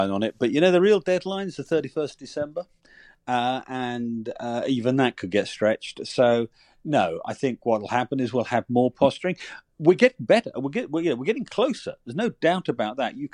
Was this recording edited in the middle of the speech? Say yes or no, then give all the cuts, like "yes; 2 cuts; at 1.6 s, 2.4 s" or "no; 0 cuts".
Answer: no; 0 cuts